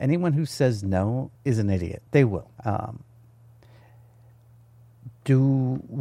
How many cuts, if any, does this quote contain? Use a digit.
3